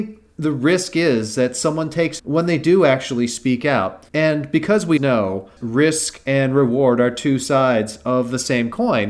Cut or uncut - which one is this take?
cut